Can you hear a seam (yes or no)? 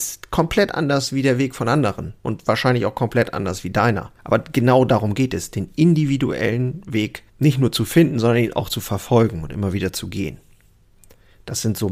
yes